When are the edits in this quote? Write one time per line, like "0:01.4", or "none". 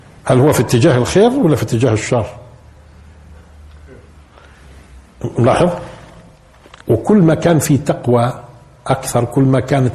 none